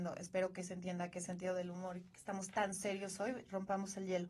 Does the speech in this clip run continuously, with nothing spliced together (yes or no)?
yes